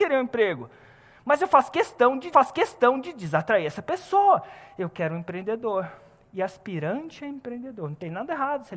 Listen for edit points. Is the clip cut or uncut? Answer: cut